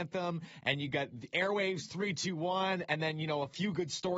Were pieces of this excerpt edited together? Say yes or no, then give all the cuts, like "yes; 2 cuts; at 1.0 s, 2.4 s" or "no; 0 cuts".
no; 0 cuts